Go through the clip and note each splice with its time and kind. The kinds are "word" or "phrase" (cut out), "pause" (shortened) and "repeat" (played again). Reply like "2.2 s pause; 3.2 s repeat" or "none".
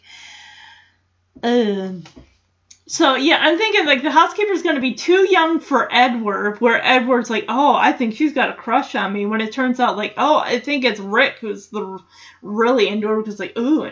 none